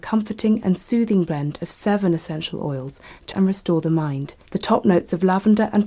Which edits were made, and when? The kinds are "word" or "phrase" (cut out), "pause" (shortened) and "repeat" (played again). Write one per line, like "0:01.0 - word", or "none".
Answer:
0:03.3 - word
0:04.5 - pause

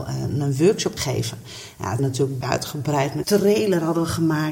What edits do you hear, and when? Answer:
0:01.0 - word
0:02.0 - word
0:02.4 - word
0:03.2 - word

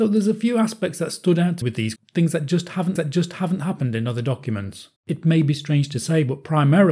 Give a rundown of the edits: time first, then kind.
0:01.6 - word
0:02.0 - word
0:03.0 - repeat
0:05.0 - pause

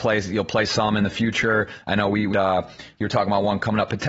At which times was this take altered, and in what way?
0:02.3 - word

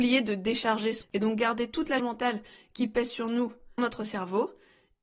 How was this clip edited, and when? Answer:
0:01.0 - word
0:02.0 - word
0:03.8 - word

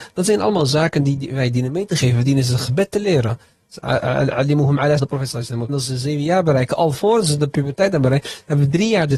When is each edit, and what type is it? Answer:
0:05.0 - word
0:05.7 - word

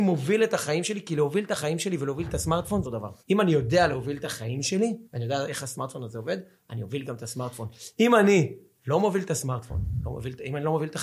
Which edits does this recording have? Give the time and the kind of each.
0:02.8 - phrase
0:03.2 - pause
0:05.1 - pause

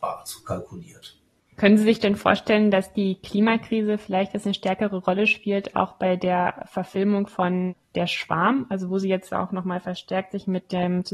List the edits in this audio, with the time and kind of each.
none

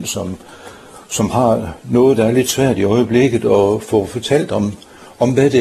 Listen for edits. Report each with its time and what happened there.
none

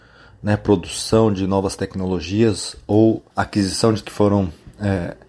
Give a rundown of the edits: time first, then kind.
0:03.3 - pause
0:04.0 - word

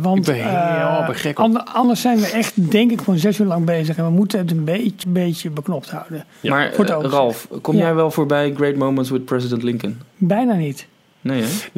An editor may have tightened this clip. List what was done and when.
0:05.0 - word

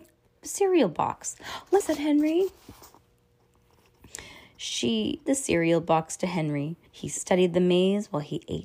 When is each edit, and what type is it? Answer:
0:01.8 - phrase
0:05.3 - phrase
0:06.9 - pause

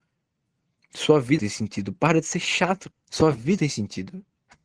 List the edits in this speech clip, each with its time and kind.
0:01.4 - word
0:02.9 - word
0:03.6 - word

